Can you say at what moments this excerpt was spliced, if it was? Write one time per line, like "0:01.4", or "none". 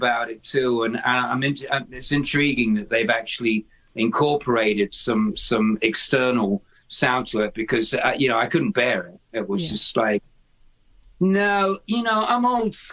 none